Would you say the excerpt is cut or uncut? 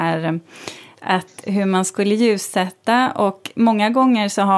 uncut